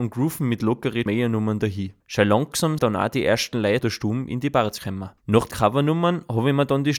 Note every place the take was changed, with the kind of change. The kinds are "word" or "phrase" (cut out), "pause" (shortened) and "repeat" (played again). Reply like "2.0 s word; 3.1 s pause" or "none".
1.1 s word; 2.0 s pause; 2.8 s word; 3.8 s word; 4.8 s word; 5.2 s pause; 5.5 s word